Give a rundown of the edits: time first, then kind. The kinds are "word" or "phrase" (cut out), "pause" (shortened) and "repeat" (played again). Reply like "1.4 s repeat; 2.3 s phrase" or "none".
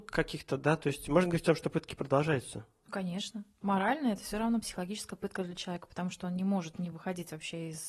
none